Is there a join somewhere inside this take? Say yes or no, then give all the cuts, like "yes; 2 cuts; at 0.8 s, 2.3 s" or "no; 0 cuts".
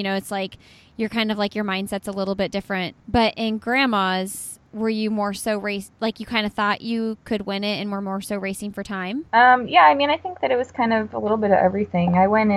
yes; 2 cuts; at 3.0 s, 9.3 s